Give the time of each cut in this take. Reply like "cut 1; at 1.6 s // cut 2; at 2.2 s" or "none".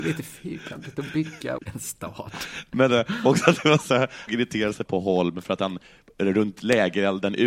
cut 1; at 1.6 s // cut 2; at 4.3 s // cut 3; at 4.9 s